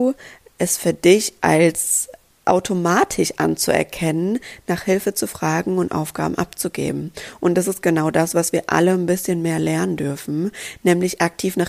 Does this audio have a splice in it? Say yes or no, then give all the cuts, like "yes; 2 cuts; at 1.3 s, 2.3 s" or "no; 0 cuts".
no; 0 cuts